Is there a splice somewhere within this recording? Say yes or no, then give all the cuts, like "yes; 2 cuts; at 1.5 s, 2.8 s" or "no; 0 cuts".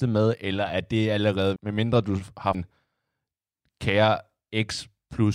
yes; 2 cuts; at 1.6 s, 2.5 s